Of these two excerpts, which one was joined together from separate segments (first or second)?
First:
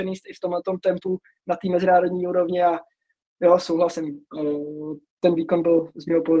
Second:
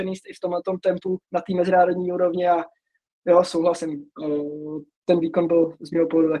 second